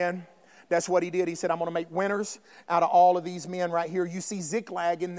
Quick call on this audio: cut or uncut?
uncut